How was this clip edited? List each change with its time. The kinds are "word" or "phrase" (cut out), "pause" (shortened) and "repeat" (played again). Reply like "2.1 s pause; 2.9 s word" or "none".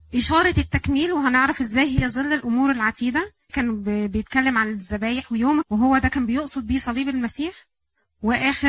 3.5 s word; 5.6 s word